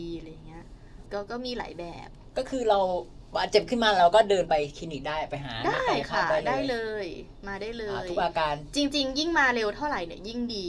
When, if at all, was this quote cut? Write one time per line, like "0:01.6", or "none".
0:01.1